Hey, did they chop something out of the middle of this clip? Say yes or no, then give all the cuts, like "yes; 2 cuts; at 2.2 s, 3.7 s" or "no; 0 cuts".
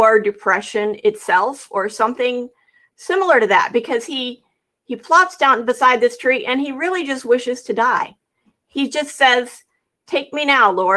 no; 0 cuts